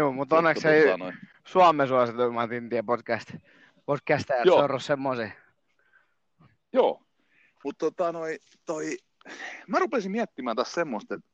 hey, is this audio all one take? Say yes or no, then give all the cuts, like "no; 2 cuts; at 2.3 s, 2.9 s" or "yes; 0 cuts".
yes; 0 cuts